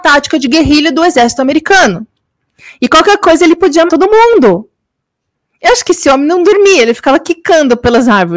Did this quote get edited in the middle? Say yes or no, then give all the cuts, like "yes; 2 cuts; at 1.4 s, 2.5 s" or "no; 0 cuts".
yes; 1 cut; at 3.9 s